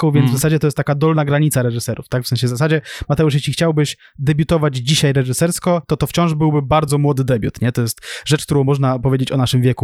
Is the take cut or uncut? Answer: uncut